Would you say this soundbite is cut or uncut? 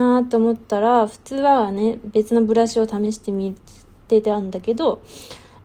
uncut